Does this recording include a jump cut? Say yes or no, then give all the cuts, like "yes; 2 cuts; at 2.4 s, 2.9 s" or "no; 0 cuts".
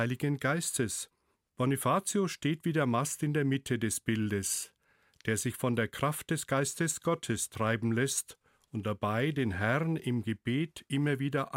no; 0 cuts